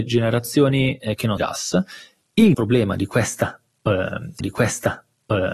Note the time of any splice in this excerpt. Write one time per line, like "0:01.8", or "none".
0:01.4
0:02.5
0:04.4